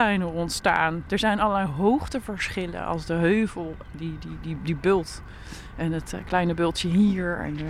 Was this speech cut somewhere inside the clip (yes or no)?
no